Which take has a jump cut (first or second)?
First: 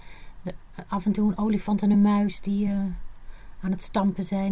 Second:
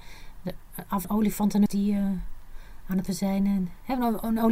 second